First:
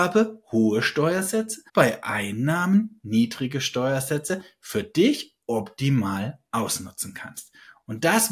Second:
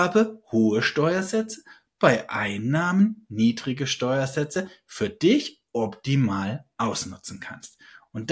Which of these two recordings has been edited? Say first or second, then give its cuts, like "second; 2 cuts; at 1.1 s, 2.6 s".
first; 1 cut; at 1.7 s